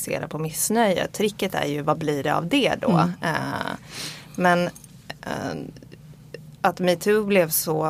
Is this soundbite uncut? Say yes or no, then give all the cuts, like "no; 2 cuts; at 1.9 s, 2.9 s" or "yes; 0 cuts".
yes; 0 cuts